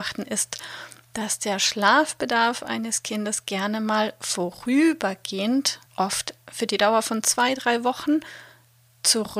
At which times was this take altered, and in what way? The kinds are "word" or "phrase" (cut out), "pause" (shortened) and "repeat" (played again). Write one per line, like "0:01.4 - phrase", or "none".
0:05.9 - pause